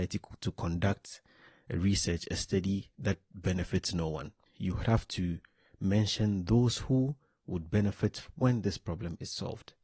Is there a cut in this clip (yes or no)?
yes